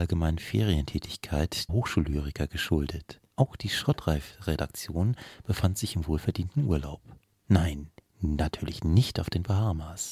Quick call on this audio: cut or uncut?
cut